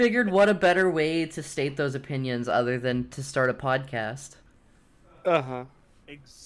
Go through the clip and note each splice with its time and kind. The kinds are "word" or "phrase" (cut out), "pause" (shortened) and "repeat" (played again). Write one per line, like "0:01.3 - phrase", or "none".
none